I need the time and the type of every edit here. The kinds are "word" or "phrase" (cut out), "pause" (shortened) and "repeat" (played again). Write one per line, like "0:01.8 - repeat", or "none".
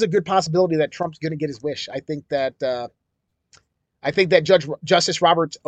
none